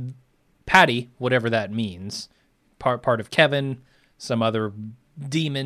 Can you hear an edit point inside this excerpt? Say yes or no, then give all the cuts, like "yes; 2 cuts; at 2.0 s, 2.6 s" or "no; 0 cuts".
no; 0 cuts